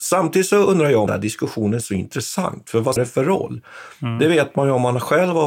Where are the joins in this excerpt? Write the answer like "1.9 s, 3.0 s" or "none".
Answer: 1.1 s, 3.0 s